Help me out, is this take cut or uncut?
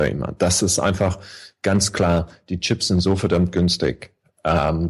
uncut